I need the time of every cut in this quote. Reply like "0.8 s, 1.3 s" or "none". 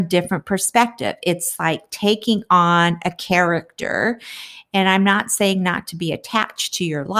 none